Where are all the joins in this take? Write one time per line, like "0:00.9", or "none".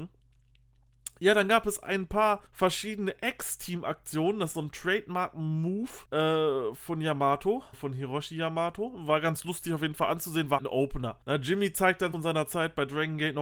0:02.5
0:04.5
0:06.1
0:07.7
0:10.6
0:11.2
0:12.1